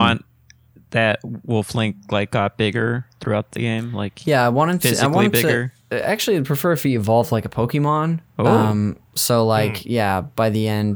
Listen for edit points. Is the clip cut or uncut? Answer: cut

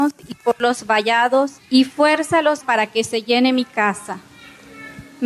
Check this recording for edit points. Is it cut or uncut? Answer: cut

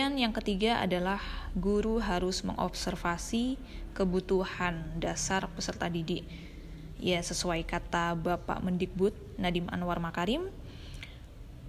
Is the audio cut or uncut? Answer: uncut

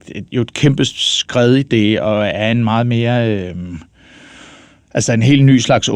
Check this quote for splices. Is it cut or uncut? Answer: uncut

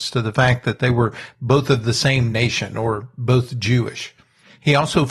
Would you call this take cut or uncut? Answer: uncut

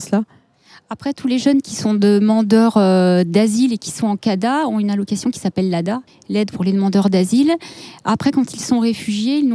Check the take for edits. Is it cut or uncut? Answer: cut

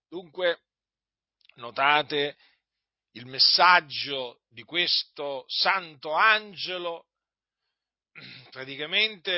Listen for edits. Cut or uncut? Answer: uncut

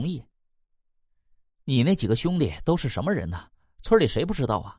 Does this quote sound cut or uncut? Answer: uncut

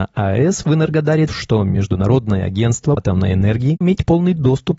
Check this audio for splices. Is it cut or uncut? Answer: cut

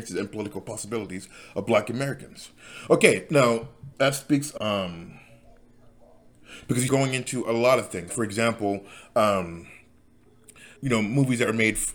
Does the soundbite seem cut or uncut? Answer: cut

